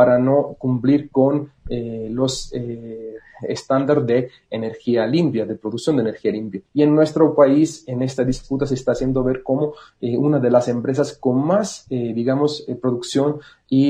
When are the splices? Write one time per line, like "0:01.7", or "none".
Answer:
0:06.7